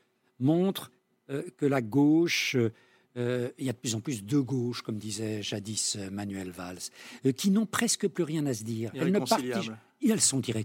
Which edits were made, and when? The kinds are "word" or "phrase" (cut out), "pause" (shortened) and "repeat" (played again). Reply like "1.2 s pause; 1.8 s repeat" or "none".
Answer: none